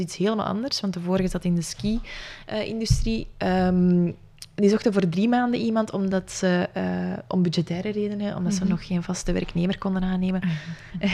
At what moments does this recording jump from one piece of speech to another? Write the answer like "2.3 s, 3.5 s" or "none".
none